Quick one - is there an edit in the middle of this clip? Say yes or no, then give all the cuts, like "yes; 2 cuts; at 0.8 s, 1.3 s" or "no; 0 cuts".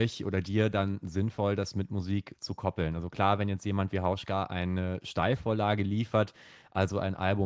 no; 0 cuts